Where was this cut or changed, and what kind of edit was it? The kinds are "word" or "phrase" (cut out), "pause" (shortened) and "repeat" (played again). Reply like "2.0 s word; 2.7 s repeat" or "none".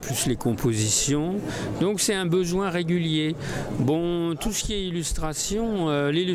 none